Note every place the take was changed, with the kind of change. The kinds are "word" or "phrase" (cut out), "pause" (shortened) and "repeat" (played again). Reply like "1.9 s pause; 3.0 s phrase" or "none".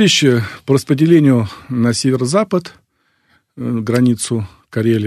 none